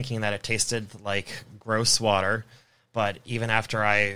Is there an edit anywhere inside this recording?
no; 0 cuts

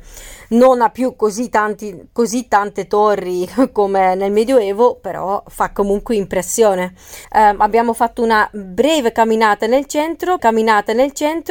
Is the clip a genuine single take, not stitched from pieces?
no; 2 cuts; at 7.2 s, 10.4 s

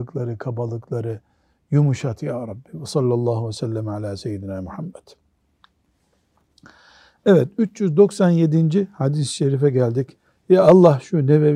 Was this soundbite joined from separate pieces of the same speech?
no; 0 cuts

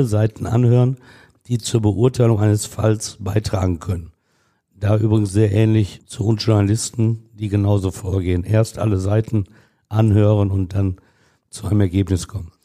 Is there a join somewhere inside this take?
no; 0 cuts

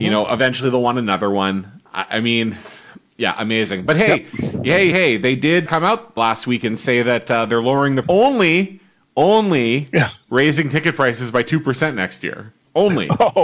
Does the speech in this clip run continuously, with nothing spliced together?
no; 4 cuts; at 4.9 s, 5.7 s, 6.2 s, 8.0 s

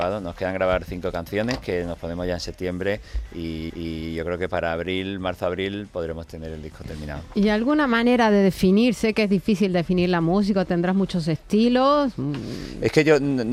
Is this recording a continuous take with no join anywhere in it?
no; 1 cut; at 3.7 s

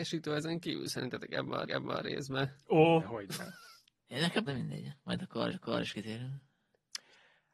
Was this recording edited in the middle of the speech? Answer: yes; 4 cuts; at 1.6 s, 3.0 s, 4.5 s, 5.5 s

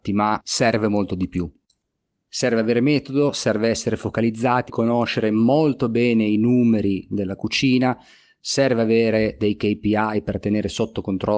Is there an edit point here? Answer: yes; 1 cut; at 4.7 s

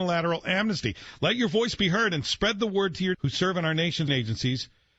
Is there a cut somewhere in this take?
yes; 2 cuts; at 3.1 s, 4.1 s

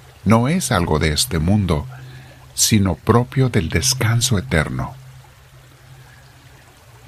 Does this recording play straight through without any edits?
yes; 0 cuts

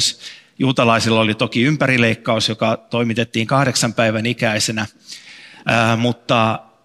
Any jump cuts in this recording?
no; 0 cuts

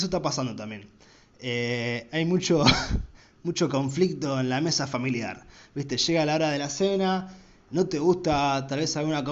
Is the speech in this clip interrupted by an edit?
no; 0 cuts

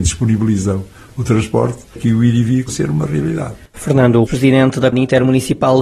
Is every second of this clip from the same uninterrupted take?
no; 4 cuts; at 2.0 s, 2.7 s, 4.3 s, 4.9 s

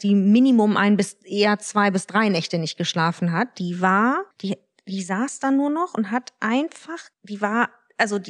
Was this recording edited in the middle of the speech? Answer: yes; 2 cuts; at 4.3 s, 7.1 s

